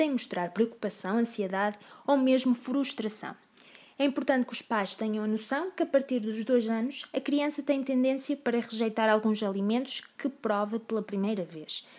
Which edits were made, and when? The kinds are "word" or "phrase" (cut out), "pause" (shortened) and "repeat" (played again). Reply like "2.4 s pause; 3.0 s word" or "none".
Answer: none